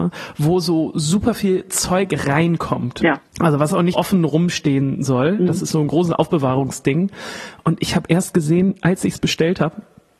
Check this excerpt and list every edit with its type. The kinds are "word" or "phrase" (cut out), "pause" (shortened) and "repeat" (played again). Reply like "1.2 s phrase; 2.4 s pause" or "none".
3.3 s pause; 3.9 s word